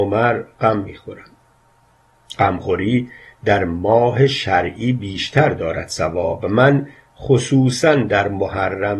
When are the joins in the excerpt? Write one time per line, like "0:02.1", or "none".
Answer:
none